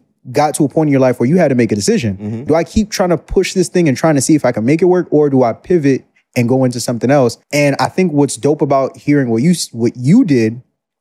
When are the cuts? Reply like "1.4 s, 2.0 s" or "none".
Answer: 2.5 s, 7.4 s